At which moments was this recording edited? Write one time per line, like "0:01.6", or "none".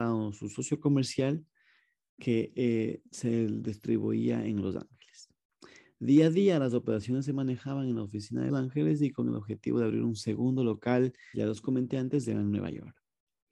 0:08.5
0:11.3